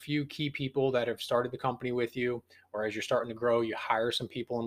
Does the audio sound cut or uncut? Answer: uncut